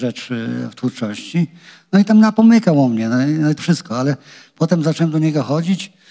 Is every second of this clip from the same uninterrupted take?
no; 1 cut; at 3.6 s

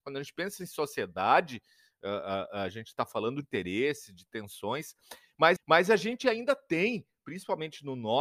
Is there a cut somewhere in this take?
yes; 2 cuts; at 3.4 s, 5.6 s

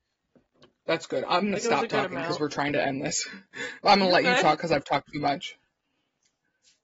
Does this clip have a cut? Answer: no; 0 cuts

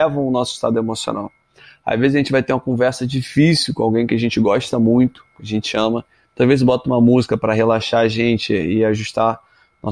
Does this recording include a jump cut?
no; 0 cuts

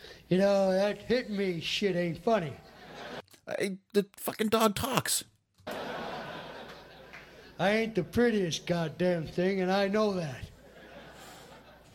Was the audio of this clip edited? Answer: no; 0 cuts

